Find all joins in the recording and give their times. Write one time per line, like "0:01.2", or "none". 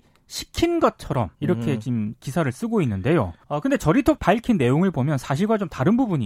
0:01.3
0:03.4
0:04.2